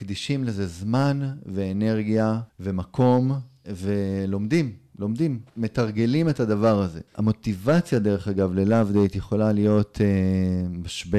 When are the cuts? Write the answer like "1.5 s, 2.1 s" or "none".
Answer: 2.5 s, 5.5 s, 7.1 s